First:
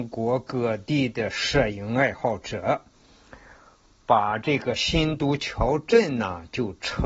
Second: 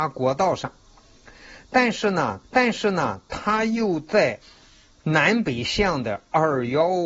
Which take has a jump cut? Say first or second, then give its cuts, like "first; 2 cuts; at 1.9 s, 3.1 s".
second; 2 cuts; at 2.4 s, 4.6 s